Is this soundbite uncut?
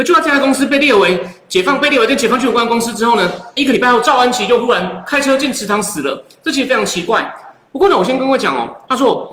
no; 1 cut; at 3.6 s

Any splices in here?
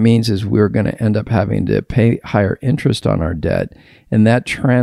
no; 0 cuts

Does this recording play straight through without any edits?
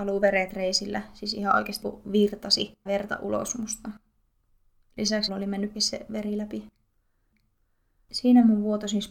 no; 4 cuts; at 1.8 s, 2.9 s, 5.3 s, 5.7 s

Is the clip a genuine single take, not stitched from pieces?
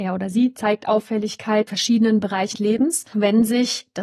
no; 3 cuts; at 1.7 s, 2.5 s, 3.1 s

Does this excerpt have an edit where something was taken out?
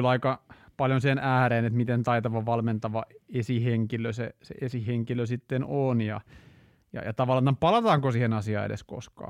no; 0 cuts

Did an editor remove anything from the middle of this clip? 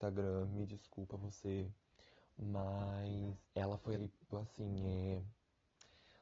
yes; 3 cuts; at 3.4 s, 4.0 s, 4.3 s

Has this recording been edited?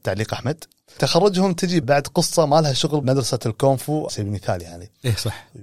yes; 3 cuts; at 1.8 s, 3.0 s, 4.1 s

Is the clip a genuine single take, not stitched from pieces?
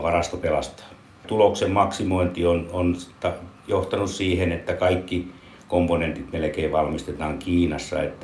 yes; 0 cuts

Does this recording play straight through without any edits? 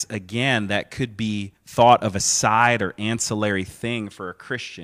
no; 1 cut; at 1.6 s

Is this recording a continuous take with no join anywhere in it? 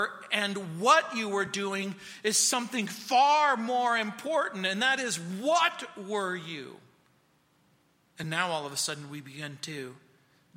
yes; 0 cuts

